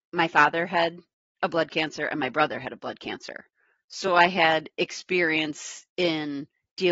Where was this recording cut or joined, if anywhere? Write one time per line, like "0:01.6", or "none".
none